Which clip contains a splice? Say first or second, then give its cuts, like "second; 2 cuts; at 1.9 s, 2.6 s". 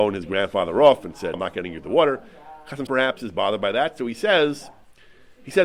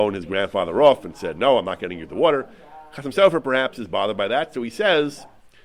first; 2 cuts; at 1.3 s, 2.9 s